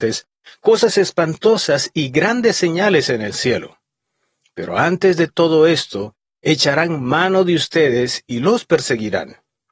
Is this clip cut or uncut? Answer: uncut